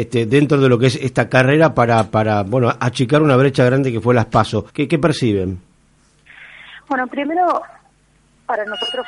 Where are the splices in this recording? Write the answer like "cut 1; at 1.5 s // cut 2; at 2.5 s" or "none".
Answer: cut 1; at 4.7 s